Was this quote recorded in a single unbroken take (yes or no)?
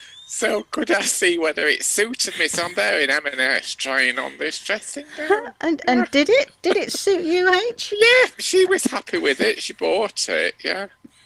no